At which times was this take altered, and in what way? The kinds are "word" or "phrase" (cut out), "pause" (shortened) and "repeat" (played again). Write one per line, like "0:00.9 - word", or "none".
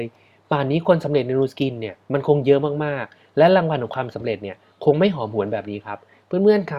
0:02.0 - pause